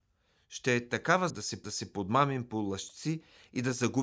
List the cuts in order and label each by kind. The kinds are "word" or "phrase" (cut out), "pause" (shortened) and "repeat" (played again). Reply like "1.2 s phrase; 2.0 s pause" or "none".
1.3 s word; 1.6 s repeat